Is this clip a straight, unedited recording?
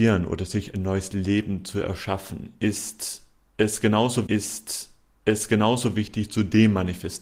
no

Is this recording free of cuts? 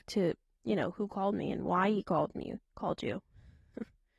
no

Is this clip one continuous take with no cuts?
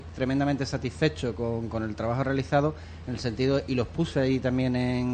yes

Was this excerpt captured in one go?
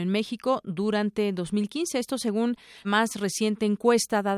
no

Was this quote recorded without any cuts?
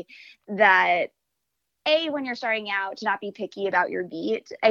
yes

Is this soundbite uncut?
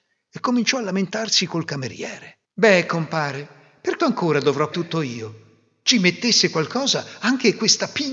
no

